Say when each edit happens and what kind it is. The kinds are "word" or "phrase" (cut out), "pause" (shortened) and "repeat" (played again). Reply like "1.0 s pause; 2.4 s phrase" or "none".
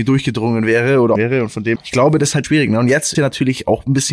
1.1 s word; 1.7 s word; 2.4 s word; 3.1 s word